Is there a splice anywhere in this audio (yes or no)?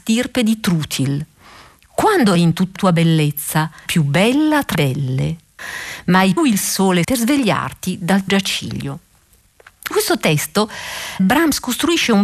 yes